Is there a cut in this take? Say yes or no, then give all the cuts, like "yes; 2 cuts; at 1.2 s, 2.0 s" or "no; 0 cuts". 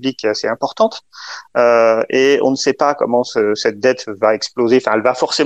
no; 0 cuts